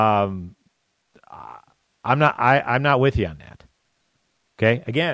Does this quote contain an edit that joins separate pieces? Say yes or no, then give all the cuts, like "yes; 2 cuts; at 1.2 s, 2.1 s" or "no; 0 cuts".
no; 0 cuts